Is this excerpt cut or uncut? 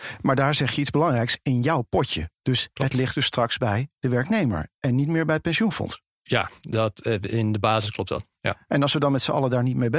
cut